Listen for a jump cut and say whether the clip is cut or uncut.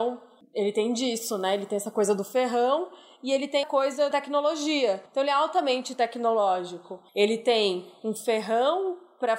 cut